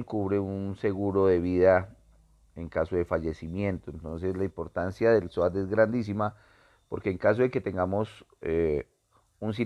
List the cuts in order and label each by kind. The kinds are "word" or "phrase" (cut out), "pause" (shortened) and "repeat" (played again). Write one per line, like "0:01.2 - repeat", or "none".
none